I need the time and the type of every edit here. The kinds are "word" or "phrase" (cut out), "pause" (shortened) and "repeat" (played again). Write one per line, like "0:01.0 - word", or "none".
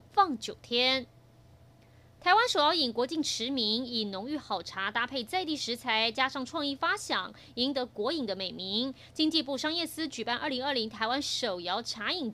none